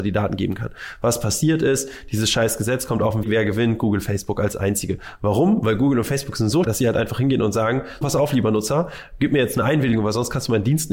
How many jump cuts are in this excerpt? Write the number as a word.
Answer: three